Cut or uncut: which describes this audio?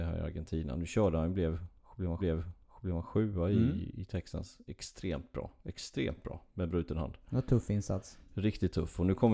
cut